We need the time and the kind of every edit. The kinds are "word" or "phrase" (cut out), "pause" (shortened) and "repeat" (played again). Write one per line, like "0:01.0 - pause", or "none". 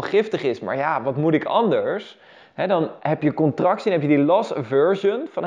none